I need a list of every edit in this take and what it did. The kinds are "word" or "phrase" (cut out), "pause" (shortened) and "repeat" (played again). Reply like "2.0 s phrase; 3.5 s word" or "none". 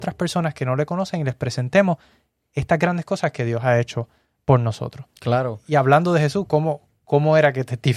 none